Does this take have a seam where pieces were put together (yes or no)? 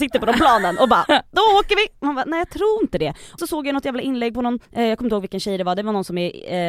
yes